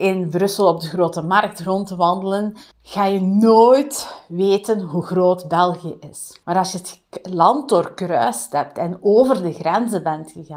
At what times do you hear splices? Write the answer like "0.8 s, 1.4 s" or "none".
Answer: 2.7 s, 6.4 s